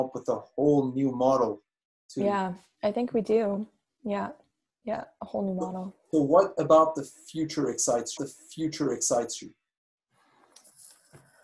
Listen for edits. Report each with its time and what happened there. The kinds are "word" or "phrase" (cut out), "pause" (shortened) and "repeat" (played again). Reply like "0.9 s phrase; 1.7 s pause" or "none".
8.2 s repeat

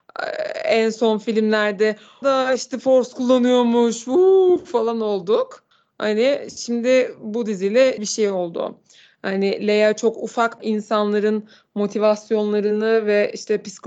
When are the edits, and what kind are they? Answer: 2.2 s phrase; 5.7 s pause; 8.0 s phrase; 10.6 s phrase

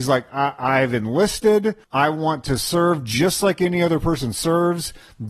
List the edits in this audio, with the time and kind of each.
1.8 s pause

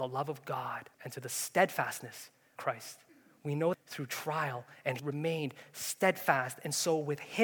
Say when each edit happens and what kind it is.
0.9 s pause; 2.6 s word; 3.1 s pause; 3.7 s phrase; 5.0 s word

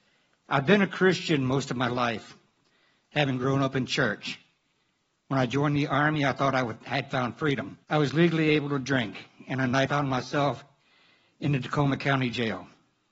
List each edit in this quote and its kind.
7.8 s pause; 9.9 s phrase

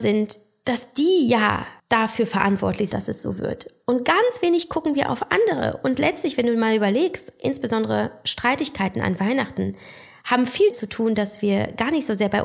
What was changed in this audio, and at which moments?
1.8 s pause; 2.9 s word; 10.7 s word

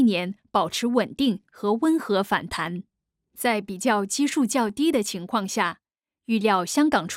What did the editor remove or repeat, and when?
2.9 s pause

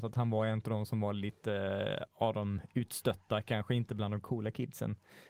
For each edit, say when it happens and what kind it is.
none

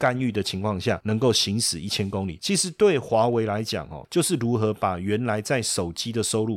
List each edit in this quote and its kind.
none

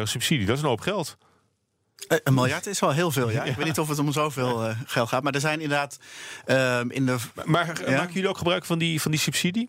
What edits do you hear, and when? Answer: none

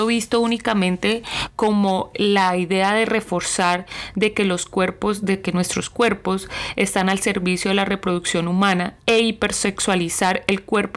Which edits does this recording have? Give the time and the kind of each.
2.1 s word; 9.0 s pause

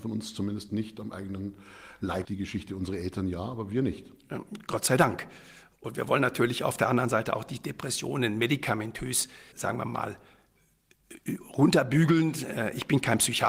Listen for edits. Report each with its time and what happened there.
2.2 s word; 9.5 s word

